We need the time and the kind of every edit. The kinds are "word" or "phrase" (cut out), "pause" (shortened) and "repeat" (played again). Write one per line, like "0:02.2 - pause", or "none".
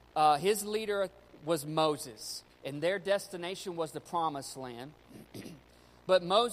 0:02.5 - pause